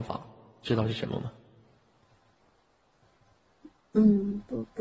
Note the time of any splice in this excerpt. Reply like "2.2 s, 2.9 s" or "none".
none